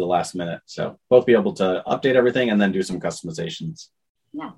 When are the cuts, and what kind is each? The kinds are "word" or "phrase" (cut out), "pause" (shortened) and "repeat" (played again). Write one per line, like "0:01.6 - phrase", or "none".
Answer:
none